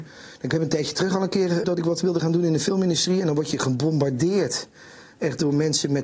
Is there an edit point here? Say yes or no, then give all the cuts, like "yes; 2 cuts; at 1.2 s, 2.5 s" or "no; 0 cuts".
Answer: yes; 1 cut; at 1.6 s